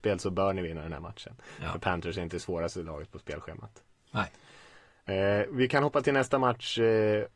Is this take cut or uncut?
uncut